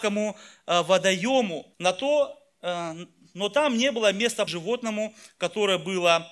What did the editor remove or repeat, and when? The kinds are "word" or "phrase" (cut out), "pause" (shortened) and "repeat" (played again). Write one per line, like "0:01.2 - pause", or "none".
0:01.7 - pause
0:04.5 - word